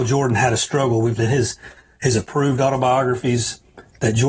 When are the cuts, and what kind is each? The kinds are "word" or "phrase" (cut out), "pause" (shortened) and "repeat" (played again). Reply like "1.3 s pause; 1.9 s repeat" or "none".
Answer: 1.2 s word